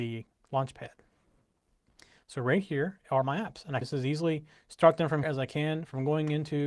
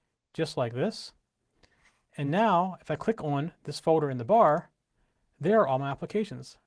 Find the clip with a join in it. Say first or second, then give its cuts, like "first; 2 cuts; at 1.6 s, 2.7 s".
first; 3 cuts; at 3.2 s, 3.8 s, 5.2 s